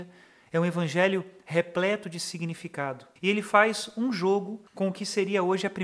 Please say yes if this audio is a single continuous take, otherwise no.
no